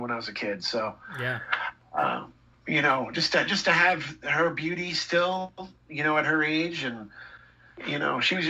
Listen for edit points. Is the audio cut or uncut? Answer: uncut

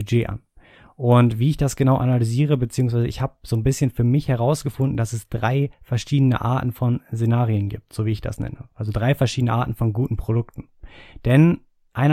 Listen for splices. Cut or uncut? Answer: cut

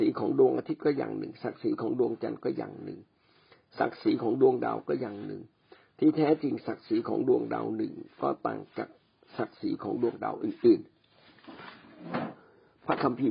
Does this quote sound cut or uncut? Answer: uncut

